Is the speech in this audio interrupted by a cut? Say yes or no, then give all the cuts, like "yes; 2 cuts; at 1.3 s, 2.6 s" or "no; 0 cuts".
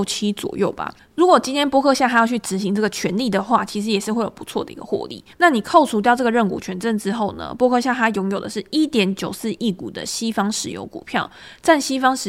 yes; 2 cuts; at 1.0 s, 5.3 s